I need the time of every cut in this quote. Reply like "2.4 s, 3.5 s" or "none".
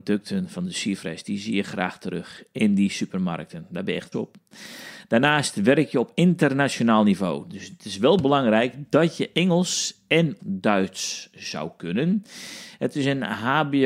4.1 s, 10.4 s